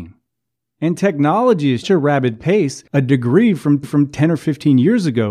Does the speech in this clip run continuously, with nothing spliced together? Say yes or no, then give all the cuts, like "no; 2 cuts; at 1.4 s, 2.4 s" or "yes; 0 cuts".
no; 3 cuts; at 1.8 s, 2.9 s, 3.8 s